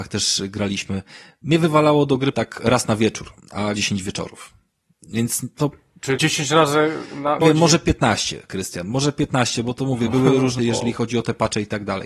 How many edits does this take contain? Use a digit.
5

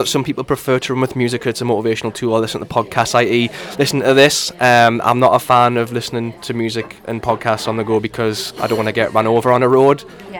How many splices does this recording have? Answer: 0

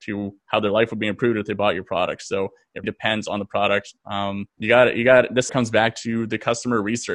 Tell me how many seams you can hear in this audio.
3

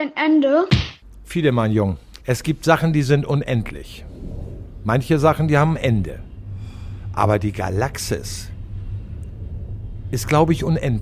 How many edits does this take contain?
1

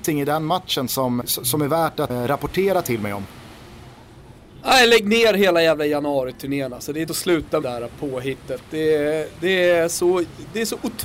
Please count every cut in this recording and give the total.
4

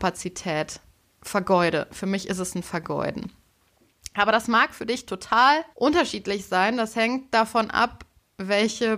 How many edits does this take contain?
1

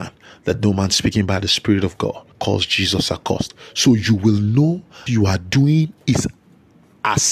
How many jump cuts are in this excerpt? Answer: 2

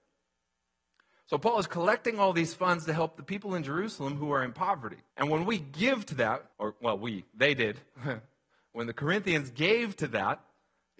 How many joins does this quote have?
2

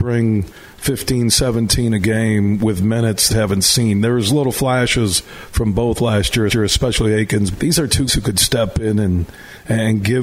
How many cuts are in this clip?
4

